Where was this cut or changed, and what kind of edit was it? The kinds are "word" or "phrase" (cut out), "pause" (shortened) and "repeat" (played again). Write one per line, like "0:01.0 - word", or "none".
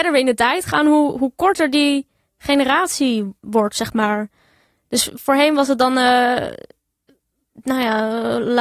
none

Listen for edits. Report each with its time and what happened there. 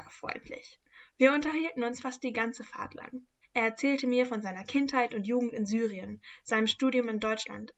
0:03.4 - pause

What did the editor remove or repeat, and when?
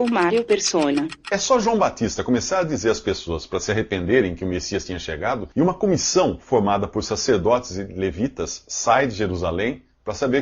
0:05.5 - pause

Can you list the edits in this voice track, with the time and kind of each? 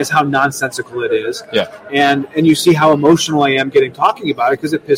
none

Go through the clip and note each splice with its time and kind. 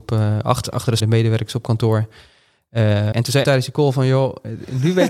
0:01.0 - word
0:03.1 - word
0:03.4 - word

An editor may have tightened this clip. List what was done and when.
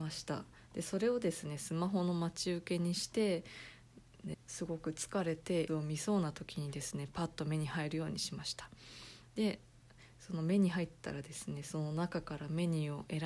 0:04.3 - word
0:05.7 - word

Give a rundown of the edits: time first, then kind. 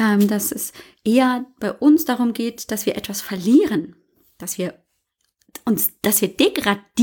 none

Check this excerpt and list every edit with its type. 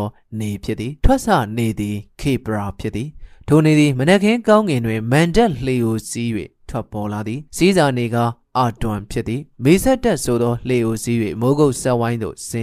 0:01.0 - pause
0:07.5 - pause
0:09.5 - pause

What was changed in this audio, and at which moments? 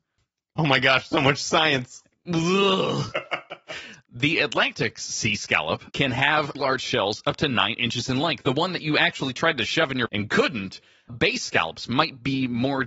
0:05.9 - pause
0:06.5 - word
0:10.1 - word
0:11.1 - word

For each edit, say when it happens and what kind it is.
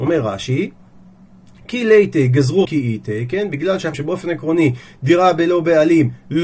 0:02.6 - phrase
0:03.9 - word

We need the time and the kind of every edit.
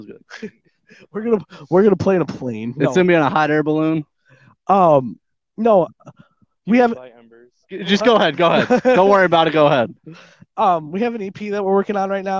0:07.6 - pause

